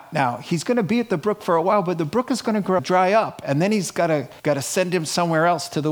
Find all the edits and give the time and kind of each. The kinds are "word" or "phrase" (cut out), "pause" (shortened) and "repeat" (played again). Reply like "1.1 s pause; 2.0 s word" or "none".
2.8 s word; 4.4 s pause